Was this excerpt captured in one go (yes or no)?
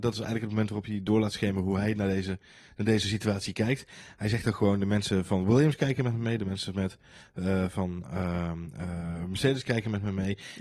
yes